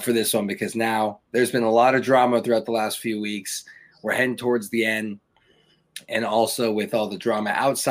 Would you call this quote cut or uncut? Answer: uncut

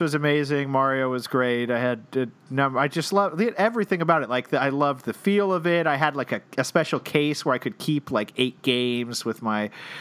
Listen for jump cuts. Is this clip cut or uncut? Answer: uncut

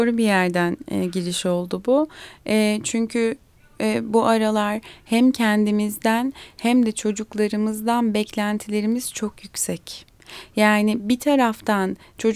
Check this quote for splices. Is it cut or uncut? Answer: uncut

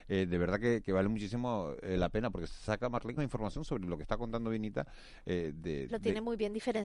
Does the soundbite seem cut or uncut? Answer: cut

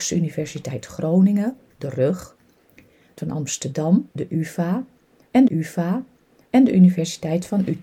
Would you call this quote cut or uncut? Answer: cut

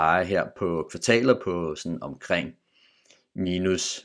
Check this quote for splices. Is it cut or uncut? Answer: uncut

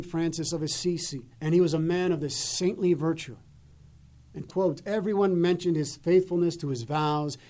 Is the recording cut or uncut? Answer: cut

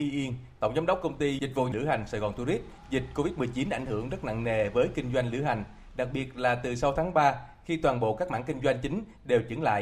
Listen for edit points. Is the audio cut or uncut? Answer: uncut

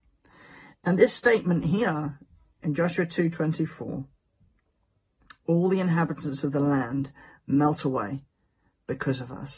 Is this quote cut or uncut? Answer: uncut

